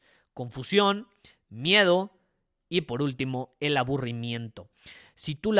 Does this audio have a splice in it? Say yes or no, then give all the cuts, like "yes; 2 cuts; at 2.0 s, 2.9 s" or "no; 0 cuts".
no; 0 cuts